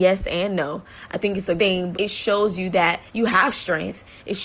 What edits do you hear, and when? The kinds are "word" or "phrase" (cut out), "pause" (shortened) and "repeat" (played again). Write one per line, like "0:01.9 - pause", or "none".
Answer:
0:01.6 - word
0:01.9 - word
0:03.1 - pause

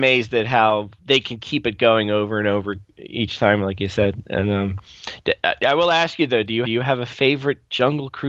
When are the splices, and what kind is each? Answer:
0:01.0 - pause
0:02.9 - pause
0:06.6 - repeat

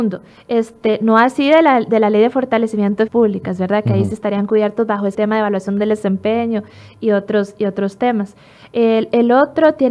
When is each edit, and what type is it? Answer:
0:03.1 - word
0:05.1 - word

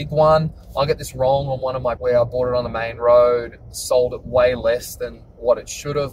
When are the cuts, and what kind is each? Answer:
0:02.0 - word

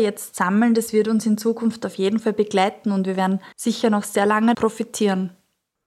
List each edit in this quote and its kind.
0:03.5 - pause
0:04.5 - word

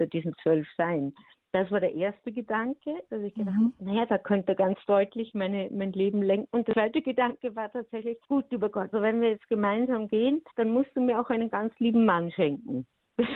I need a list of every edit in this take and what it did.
0:01.3 - pause
0:08.2 - pause
0:08.9 - word
0:10.5 - pause

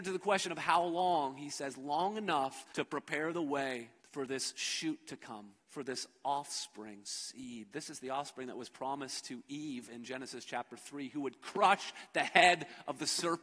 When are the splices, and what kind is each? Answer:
0:02.7 - pause
0:04.0 - pause
0:05.6 - pause
0:07.0 - word

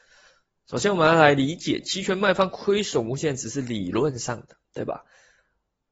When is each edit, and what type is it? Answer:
0:04.6 - pause

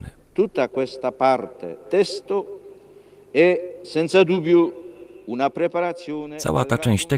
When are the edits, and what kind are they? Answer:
0:01.8 - word

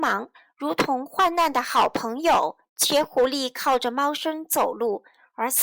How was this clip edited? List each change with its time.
0:02.6 - pause

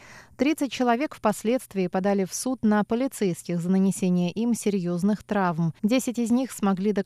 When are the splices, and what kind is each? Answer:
0:05.8 - pause

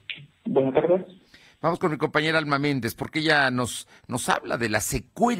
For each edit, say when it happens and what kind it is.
none

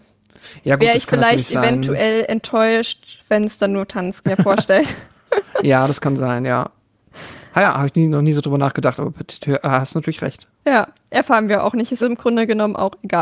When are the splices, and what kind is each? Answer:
0:04.2 - phrase
0:12.0 - word

